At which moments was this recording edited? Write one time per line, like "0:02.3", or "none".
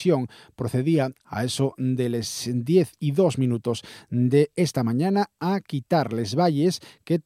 none

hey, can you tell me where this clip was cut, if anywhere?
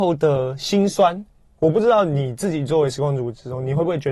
none

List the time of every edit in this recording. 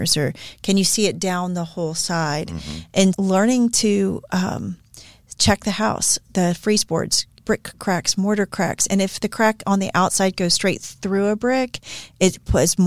0:03.1
0:07.4

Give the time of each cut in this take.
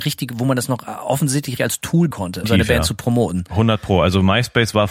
0:01.6
0:02.1
0:02.4

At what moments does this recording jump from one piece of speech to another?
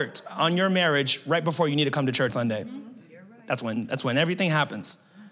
0:02.3

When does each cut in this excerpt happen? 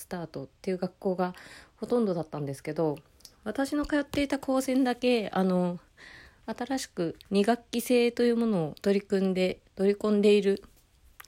0:07.2
0:08.8
0:09.7

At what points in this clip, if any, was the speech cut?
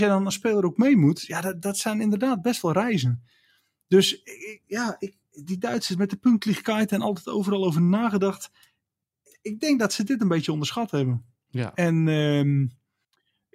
none

